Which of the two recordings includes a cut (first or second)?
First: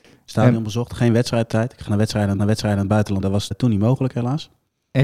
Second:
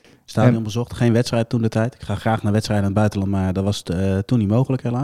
first